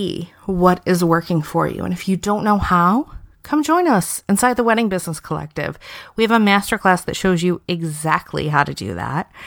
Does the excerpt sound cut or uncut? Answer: uncut